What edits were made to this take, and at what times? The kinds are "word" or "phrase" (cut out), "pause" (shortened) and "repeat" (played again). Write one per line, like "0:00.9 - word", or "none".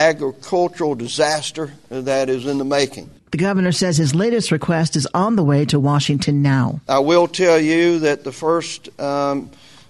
0:03.2 - pause